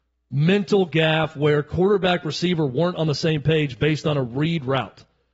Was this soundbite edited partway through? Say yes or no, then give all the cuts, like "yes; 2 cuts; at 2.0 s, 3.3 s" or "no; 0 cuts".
no; 0 cuts